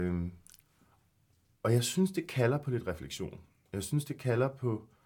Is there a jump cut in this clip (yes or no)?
no